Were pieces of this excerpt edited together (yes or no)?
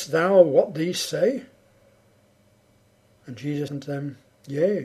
yes